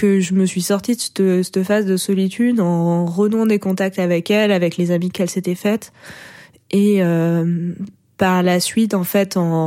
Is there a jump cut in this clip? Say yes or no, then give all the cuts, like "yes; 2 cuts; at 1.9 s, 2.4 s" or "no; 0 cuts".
no; 0 cuts